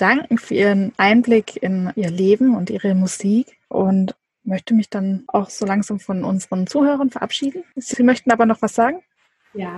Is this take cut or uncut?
uncut